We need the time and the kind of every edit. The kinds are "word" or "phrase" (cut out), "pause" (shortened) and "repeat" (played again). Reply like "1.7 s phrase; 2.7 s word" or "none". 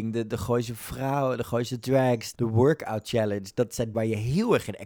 2.3 s word; 3.9 s word